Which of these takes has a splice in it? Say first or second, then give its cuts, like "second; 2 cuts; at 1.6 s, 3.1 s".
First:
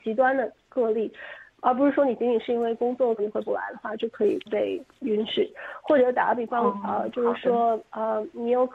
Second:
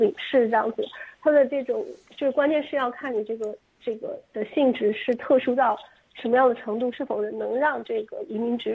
first; 1 cut; at 3.2 s